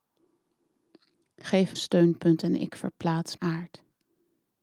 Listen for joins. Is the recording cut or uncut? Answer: cut